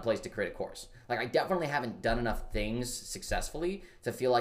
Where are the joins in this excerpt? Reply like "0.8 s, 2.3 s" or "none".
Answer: none